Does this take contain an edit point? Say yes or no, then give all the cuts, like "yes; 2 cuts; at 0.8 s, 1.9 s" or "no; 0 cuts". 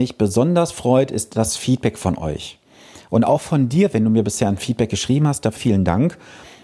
yes; 1 cut; at 5.6 s